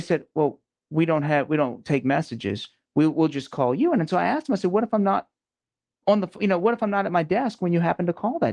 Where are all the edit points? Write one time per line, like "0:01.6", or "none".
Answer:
none